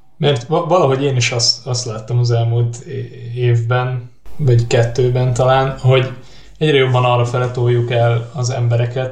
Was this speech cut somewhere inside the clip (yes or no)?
no